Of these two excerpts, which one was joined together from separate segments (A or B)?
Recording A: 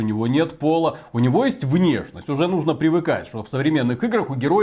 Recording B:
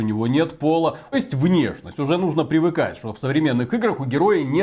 B